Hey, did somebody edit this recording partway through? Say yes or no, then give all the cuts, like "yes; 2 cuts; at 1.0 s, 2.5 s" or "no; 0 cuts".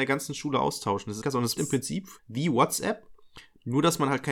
yes; 3 cuts; at 1.2 s, 1.6 s, 2.2 s